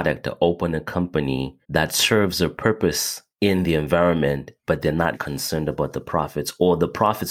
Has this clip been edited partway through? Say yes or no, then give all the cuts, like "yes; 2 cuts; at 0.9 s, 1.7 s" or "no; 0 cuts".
yes; 3 cuts; at 1.6 s, 3.3 s, 5.1 s